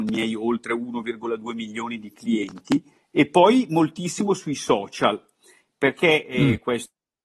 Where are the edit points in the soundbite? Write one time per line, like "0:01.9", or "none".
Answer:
0:03.0